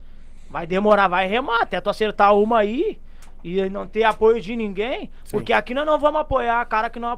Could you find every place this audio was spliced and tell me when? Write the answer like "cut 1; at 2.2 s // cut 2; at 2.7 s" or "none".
none